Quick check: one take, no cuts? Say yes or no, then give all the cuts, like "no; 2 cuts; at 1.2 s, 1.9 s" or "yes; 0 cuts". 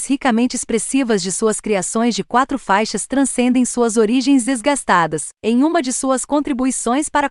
no; 1 cut; at 5.3 s